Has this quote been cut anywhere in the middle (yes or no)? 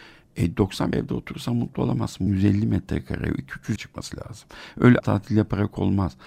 yes